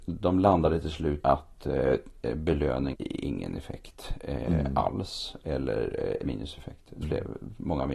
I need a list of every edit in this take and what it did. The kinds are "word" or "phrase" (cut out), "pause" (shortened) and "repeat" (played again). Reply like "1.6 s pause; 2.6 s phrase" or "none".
1.2 s word; 2.9 s word; 6.2 s word; 7.0 s word